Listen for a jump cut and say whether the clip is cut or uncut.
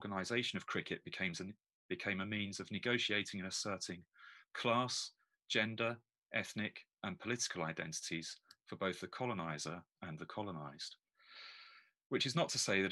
uncut